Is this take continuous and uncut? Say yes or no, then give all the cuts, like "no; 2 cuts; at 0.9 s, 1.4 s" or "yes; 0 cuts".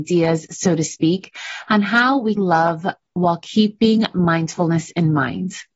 no; 1 cut; at 2.4 s